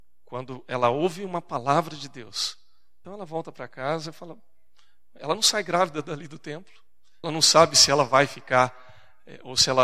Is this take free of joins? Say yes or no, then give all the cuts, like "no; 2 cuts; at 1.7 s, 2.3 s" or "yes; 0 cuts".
no; 2 cuts; at 3.0 s, 7.2 s